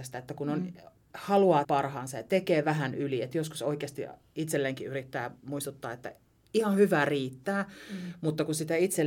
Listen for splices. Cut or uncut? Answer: cut